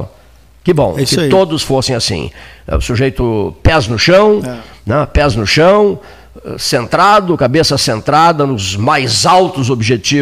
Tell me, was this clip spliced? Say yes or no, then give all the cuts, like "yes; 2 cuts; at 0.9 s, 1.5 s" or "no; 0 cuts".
no; 0 cuts